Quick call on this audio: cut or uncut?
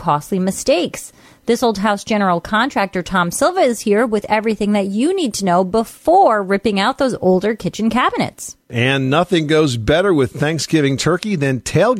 uncut